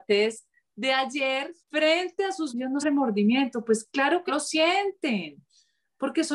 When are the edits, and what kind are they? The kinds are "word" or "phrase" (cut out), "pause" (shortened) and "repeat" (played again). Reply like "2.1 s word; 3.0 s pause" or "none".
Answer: 1.6 s pause; 2.5 s phrase; 2.8 s word; 4.3 s word